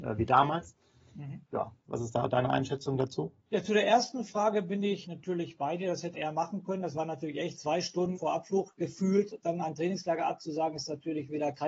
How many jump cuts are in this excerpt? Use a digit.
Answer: 6